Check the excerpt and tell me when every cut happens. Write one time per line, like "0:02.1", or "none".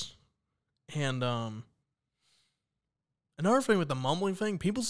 none